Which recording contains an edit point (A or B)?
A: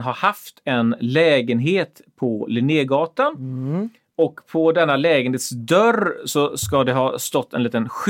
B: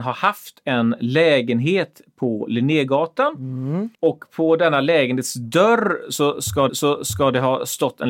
B